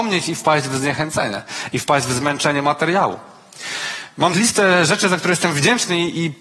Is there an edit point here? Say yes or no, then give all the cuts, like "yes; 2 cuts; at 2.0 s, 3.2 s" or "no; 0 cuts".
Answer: yes; 1 cut; at 4.3 s